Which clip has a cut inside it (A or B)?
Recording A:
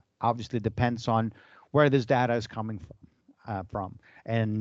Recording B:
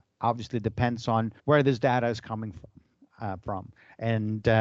B